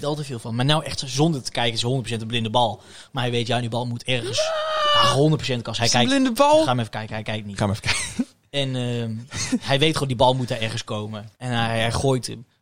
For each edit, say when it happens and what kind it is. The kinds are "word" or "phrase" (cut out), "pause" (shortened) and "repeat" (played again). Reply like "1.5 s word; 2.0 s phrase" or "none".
11.3 s pause